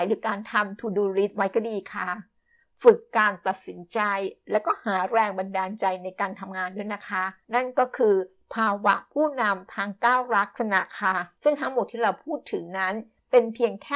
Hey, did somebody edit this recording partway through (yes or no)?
yes